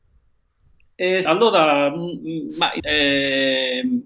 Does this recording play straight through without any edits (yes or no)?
no